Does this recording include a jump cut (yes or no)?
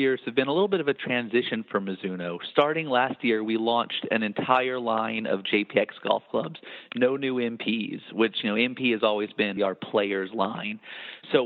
yes